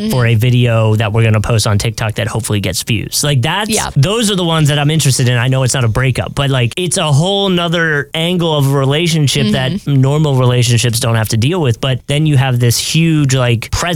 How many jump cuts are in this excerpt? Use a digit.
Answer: 0